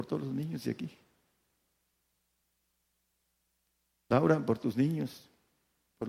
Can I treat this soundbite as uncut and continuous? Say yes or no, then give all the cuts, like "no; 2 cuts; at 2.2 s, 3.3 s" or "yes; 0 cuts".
yes; 0 cuts